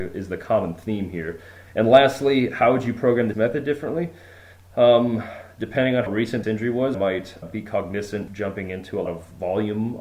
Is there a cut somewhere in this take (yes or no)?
yes